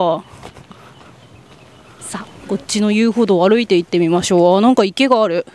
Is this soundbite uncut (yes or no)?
yes